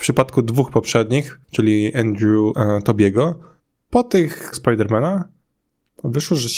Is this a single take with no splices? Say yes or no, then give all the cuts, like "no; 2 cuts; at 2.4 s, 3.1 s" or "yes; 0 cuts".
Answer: no; 4 cuts; at 1.4 s, 2.5 s, 3.6 s, 4.5 s